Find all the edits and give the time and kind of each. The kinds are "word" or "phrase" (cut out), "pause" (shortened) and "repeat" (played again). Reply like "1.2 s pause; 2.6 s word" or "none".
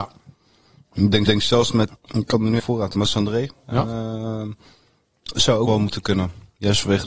1.3 s repeat; 1.9 s word; 2.6 s phrase; 2.9 s word; 5.0 s pause; 5.7 s word